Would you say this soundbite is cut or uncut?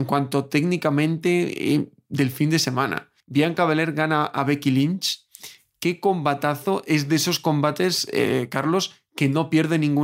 cut